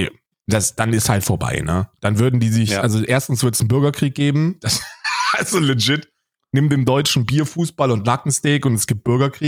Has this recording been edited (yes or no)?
no